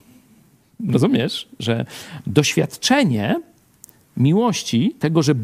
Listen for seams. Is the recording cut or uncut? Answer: uncut